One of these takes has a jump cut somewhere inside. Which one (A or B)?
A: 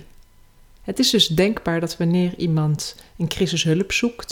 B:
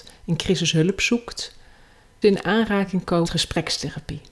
B